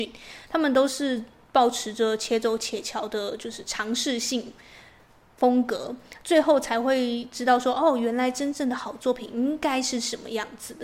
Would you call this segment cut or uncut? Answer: uncut